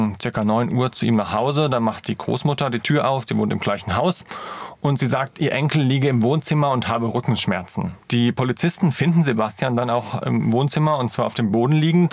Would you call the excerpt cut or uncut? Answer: cut